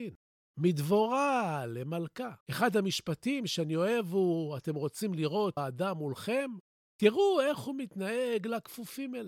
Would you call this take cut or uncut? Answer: cut